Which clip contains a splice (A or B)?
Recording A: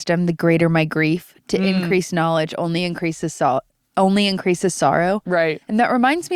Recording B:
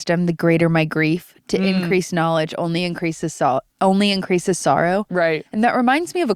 B